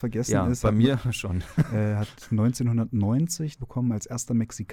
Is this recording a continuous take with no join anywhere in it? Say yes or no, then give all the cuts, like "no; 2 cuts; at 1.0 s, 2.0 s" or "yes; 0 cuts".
no; 1 cut; at 3.6 s